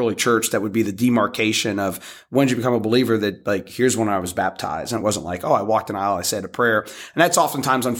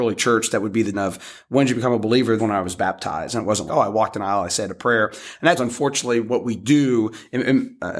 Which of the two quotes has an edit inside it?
second; 4 cuts; at 0.9 s, 2.4 s, 3.7 s, 5.6 s

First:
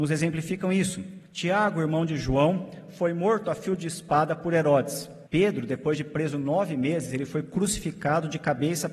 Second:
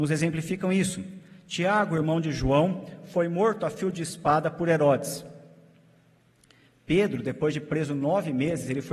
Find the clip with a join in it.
first; 2 cuts; at 1.3 s, 5.3 s

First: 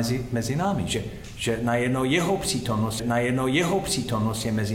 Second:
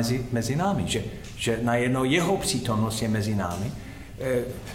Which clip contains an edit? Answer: first; 1 cut; at 3.0 s

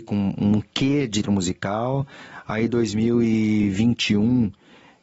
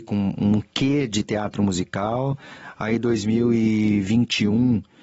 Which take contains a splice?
first; 1 cut; at 1.2 s

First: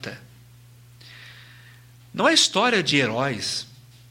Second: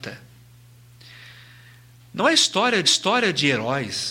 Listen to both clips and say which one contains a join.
second; 1 cut; at 2.8 s

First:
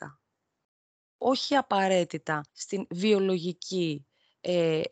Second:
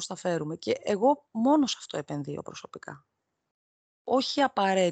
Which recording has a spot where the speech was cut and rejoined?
first; 1 cut; at 2.5 s

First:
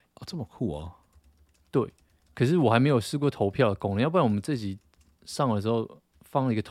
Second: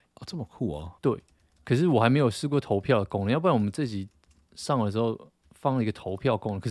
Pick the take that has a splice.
second; 1 cut; at 1.0 s

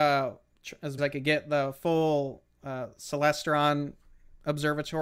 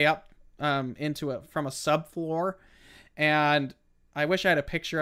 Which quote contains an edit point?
first; 1 cut; at 1.0 s

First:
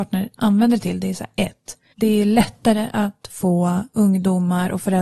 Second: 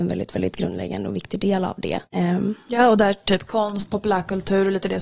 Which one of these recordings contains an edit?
second; 1 cut; at 2.1 s

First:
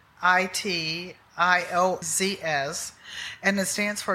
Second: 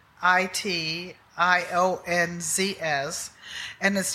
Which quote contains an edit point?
first; 1 cut; at 2.0 s

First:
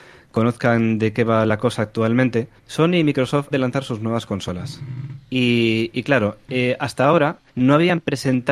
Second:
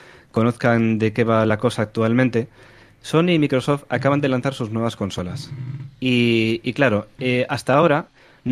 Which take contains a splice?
first; 3 cuts; at 2.6 s, 3.5 s, 7.5 s

